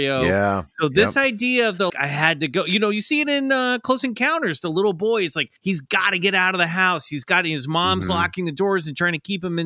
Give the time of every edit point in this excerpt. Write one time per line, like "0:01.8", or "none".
0:01.9
0:05.6